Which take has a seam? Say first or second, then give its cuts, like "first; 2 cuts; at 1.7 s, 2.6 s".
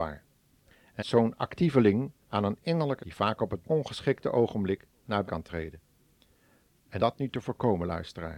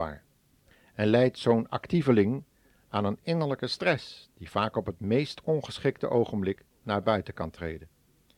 first; 6 cuts; at 1.0 s, 2.2 s, 3.0 s, 3.6 s, 5.3 s, 7.0 s